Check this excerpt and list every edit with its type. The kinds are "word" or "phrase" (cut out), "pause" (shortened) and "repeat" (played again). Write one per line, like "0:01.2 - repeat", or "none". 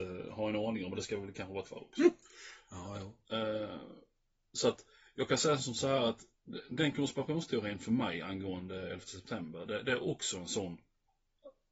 0:01.6 - word
0:06.7 - word